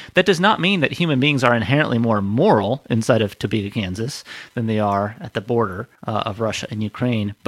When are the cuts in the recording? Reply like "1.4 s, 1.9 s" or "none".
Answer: 5.9 s